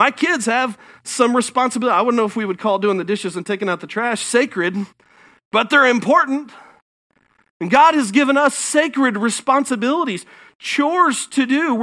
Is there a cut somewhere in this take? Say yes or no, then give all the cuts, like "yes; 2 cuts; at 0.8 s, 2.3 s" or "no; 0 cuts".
no; 0 cuts